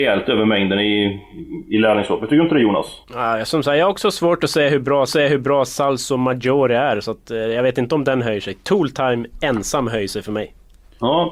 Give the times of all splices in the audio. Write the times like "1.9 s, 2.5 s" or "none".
3.0 s, 5.1 s